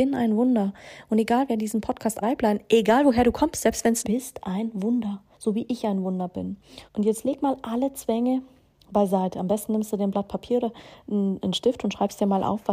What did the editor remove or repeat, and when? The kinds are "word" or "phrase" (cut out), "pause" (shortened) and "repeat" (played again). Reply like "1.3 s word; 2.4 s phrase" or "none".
2.2 s phrase; 4.0 s phrase; 5.3 s pause; 6.9 s pause